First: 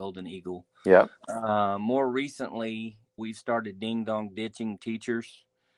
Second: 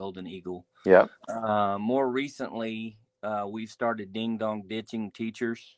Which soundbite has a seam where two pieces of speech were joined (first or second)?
first